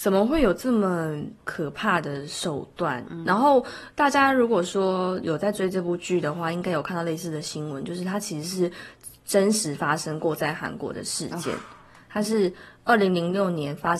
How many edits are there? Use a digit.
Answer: 0